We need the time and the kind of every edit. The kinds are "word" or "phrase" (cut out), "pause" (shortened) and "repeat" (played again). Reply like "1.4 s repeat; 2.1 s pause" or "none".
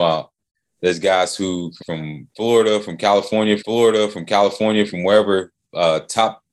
1.8 s word; 3.6 s repeat; 5.6 s pause